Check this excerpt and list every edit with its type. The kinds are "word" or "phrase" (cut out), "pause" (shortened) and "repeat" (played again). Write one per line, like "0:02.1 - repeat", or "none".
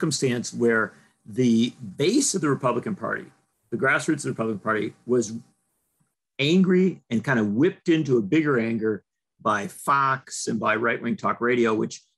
none